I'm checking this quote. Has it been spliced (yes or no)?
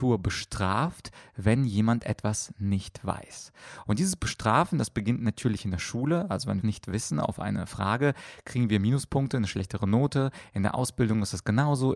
yes